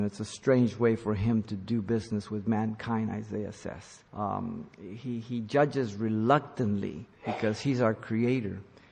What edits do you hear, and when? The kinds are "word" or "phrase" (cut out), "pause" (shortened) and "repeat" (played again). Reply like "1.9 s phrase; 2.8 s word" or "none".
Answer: 4.1 s pause; 7.1 s pause